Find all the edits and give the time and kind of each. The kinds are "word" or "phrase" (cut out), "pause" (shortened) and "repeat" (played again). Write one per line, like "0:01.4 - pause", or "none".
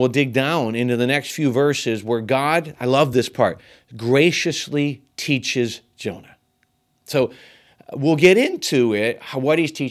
none